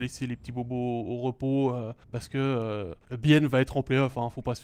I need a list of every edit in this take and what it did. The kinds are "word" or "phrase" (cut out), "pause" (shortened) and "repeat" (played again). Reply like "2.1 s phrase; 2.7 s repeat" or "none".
2.0 s pause; 3.0 s pause